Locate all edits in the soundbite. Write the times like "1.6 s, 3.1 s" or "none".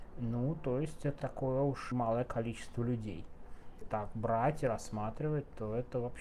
1.2 s, 1.9 s, 3.8 s